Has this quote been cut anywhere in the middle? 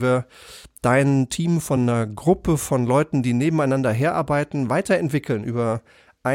no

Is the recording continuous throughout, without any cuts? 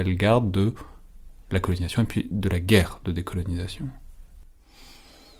yes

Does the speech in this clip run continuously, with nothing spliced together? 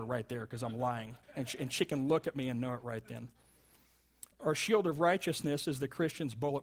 no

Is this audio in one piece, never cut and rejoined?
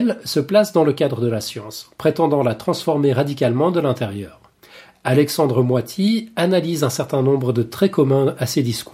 yes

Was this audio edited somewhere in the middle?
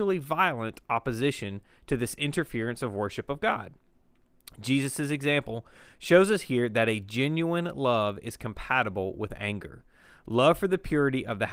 no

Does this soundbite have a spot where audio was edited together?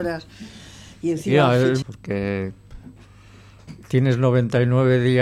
yes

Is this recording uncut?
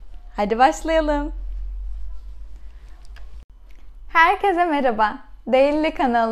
yes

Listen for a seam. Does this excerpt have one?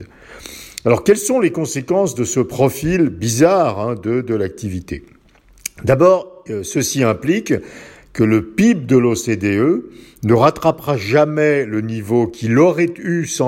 no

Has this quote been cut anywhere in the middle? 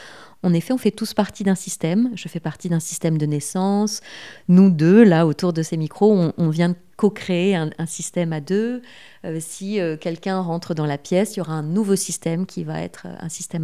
no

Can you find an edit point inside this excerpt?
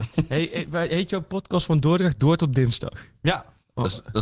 no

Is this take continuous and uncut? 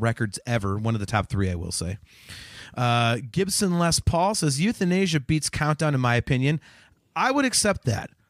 yes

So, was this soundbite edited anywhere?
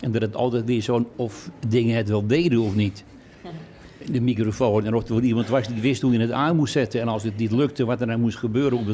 yes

